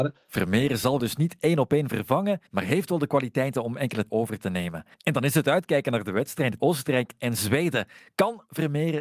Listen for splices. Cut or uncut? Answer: cut